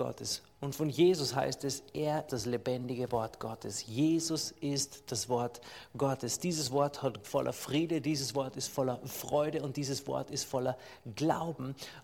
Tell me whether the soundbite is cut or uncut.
cut